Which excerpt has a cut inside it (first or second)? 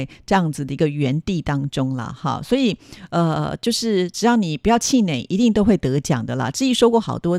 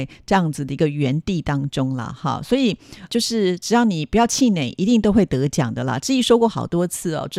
second